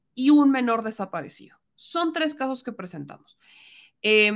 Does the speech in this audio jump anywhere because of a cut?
no; 0 cuts

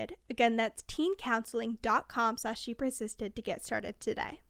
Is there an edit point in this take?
no; 0 cuts

